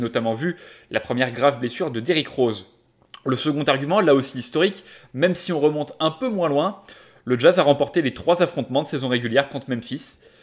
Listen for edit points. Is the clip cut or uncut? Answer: uncut